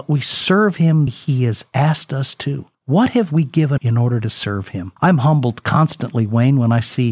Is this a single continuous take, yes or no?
no